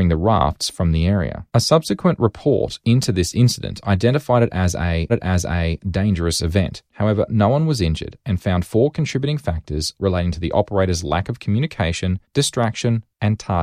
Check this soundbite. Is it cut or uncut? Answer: cut